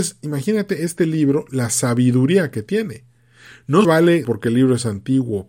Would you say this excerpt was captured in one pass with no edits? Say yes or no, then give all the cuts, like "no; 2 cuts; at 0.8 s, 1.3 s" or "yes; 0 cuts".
no; 3 cuts; at 1.5 s, 3.8 s, 4.2 s